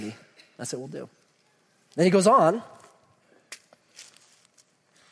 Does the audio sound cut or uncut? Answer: uncut